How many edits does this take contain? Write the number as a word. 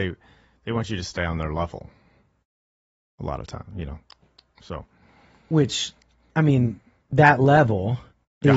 zero